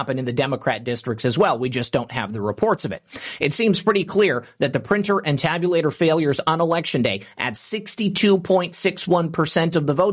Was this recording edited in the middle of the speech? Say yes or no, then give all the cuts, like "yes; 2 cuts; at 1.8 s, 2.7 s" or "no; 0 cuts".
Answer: no; 0 cuts